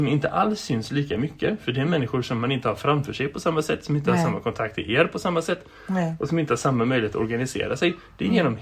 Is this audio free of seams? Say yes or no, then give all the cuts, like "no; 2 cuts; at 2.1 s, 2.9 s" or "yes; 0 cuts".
yes; 0 cuts